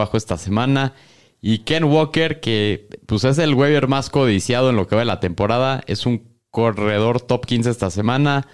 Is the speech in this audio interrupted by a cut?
no; 0 cuts

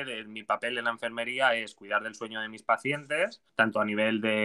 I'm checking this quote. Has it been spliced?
yes; 1 cut; at 3.5 s

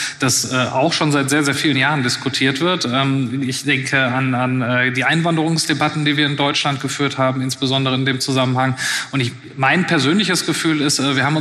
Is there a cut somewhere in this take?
no; 0 cuts

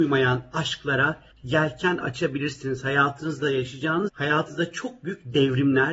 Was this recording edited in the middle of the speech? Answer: yes; 2 cuts; at 1.3 s, 4.1 s

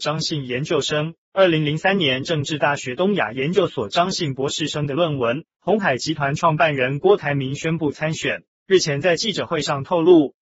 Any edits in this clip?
yes; 3 cuts; at 1.2 s, 5.5 s, 8.5 s

